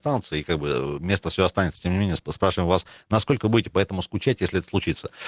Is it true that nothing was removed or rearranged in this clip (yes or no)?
yes